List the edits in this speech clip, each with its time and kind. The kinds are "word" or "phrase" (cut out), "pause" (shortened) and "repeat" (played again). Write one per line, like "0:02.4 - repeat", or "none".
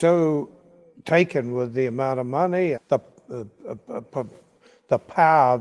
0:02.7 - word